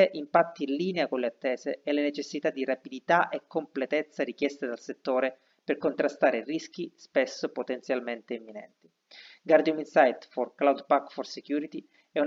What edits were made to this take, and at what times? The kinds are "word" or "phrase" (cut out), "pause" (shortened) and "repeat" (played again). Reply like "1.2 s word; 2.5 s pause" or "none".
none